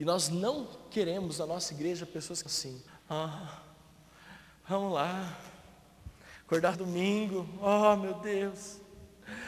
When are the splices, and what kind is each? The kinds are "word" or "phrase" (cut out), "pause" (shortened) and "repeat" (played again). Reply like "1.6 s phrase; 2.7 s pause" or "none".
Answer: 2.5 s word; 2.9 s pause; 6.7 s phrase